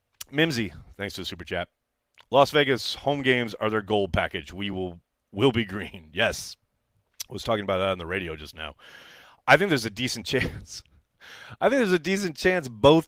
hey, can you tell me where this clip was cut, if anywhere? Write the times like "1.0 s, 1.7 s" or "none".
none

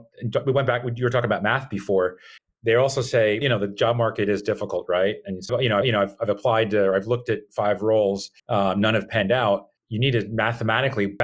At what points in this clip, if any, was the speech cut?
2.4 s, 3.4 s, 5.5 s, 5.8 s, 8.4 s, 9.8 s

